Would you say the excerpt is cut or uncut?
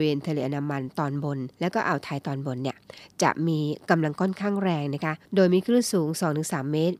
cut